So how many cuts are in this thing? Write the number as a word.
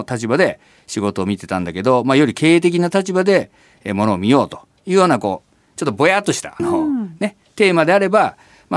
one